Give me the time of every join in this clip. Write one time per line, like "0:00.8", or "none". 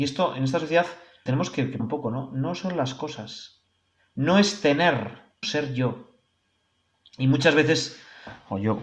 0:01.3
0:01.8
0:05.4